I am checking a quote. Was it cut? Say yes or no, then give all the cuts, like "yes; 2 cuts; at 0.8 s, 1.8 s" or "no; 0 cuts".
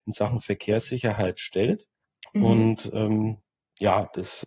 no; 0 cuts